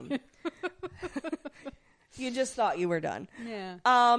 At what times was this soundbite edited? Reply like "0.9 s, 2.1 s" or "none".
none